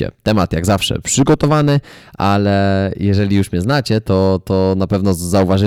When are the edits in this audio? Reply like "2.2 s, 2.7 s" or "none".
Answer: none

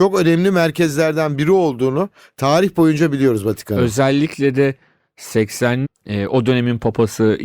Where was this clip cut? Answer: 5.8 s

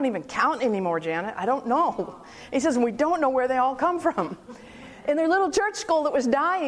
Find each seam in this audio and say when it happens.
none

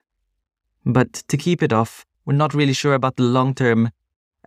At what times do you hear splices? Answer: 2.1 s

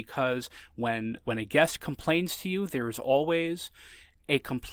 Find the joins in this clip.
1.2 s

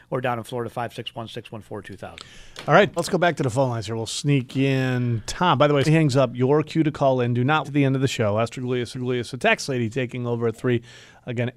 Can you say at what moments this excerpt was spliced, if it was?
3.0 s, 5.9 s, 7.6 s, 8.9 s

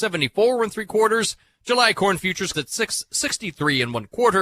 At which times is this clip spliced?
2.5 s

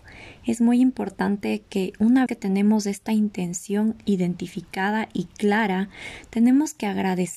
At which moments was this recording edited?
2.3 s

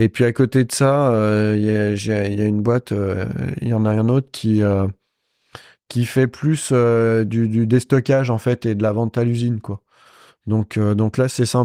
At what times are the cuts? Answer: none

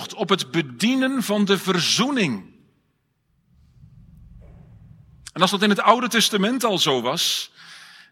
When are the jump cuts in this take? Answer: none

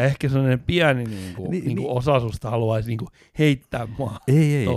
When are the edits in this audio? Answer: none

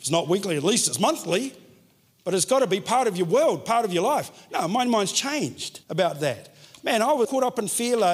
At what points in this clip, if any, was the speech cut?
5.8 s, 7.2 s

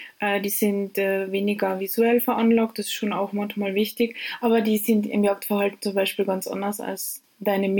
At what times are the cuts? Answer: none

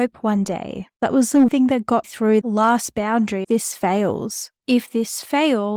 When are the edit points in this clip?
1.0 s, 1.5 s, 2.0 s, 2.4 s, 3.4 s

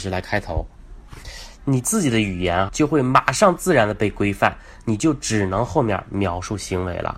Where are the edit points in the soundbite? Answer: 2.7 s

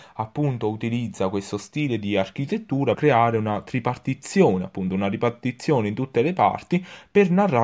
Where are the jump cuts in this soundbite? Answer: 2.9 s

